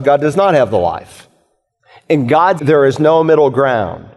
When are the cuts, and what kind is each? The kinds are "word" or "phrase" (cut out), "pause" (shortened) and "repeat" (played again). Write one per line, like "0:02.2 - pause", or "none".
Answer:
0:02.6 - word